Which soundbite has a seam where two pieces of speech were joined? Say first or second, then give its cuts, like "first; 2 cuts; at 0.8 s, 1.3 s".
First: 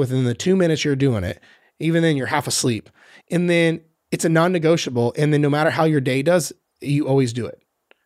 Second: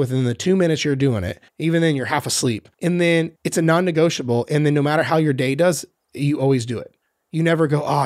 second; 4 cuts; at 1.5 s, 2.7 s, 3.4 s, 7.0 s